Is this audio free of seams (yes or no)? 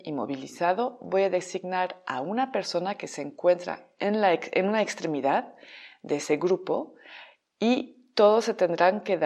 yes